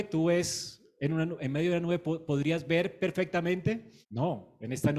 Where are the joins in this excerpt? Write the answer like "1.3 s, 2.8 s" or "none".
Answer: 4.0 s